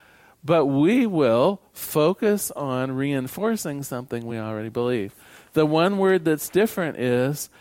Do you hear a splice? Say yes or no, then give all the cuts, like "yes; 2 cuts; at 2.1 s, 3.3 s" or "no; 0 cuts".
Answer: no; 0 cuts